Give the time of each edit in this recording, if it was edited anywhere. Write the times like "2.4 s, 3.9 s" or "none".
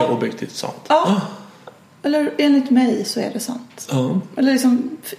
none